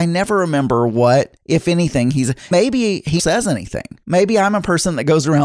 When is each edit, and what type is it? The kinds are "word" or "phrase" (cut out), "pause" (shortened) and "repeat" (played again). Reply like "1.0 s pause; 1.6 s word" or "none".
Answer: 1.4 s pause; 2.5 s word; 3.2 s word; 4.0 s pause